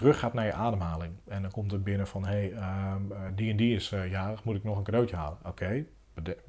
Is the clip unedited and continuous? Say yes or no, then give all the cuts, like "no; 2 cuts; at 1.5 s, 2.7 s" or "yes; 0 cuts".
yes; 0 cuts